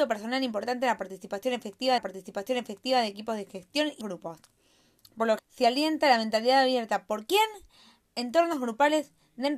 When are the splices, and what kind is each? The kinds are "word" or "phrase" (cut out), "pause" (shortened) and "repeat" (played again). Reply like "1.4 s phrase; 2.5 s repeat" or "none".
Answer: 2.0 s repeat; 4.0 s word; 5.4 s word